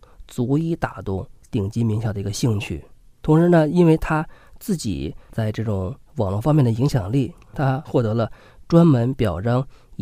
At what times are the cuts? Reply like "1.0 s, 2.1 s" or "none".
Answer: none